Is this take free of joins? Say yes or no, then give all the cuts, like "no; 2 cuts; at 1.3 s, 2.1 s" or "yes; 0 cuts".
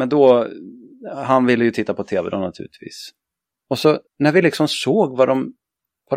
no; 1 cut; at 4.1 s